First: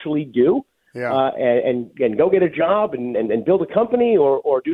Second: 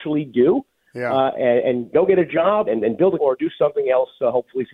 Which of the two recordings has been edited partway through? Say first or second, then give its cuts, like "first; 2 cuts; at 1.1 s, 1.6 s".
second; 3 cuts; at 1.9 s, 2.7 s, 3.2 s